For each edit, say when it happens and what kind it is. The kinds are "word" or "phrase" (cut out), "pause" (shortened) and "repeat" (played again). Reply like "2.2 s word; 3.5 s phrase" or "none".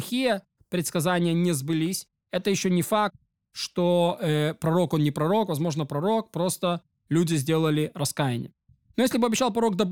none